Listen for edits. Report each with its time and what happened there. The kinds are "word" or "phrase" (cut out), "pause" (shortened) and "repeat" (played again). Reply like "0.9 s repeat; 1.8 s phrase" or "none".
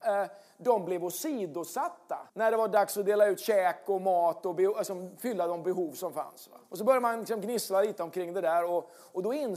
2.3 s pause; 6.6 s pause